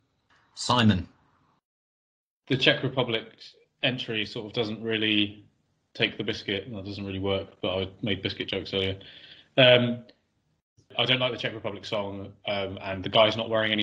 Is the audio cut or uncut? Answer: uncut